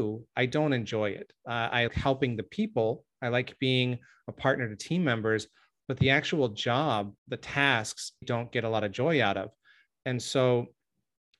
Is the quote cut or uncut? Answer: cut